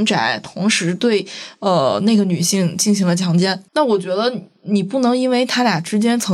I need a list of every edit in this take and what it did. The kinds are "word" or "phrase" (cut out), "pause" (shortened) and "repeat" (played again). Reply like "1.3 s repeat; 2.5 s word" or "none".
3.7 s pause